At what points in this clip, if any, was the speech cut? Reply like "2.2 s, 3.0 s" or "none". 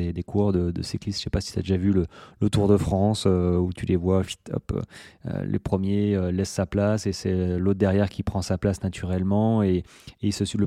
none